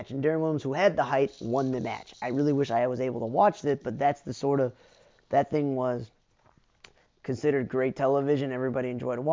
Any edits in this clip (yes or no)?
no